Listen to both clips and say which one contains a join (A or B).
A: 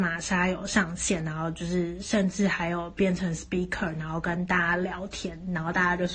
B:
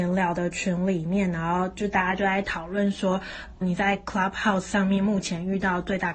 B